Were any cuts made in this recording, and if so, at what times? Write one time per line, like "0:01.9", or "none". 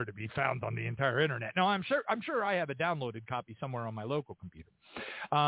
none